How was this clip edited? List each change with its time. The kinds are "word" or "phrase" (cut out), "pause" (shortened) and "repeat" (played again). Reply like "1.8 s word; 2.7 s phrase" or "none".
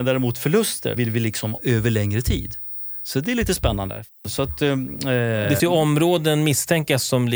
1.0 s word; 1.6 s word; 5.6 s word